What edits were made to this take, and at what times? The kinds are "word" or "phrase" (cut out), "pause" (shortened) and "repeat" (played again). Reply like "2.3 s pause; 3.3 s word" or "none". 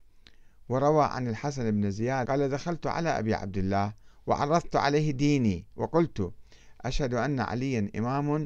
2.2 s word